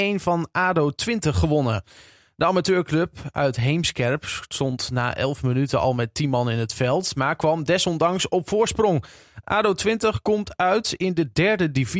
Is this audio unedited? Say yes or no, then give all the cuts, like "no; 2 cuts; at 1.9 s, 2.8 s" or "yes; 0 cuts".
yes; 0 cuts